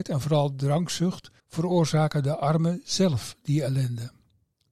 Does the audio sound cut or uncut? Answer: cut